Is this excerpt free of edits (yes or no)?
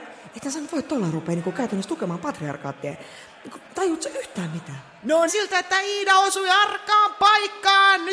no